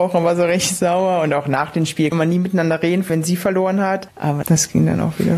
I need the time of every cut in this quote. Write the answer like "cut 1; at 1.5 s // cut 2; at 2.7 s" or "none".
cut 1; at 2.1 s // cut 2; at 3.1 s // cut 3; at 4.4 s